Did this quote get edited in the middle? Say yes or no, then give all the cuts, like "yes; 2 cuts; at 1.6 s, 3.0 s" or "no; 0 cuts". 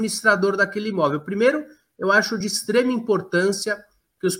no; 0 cuts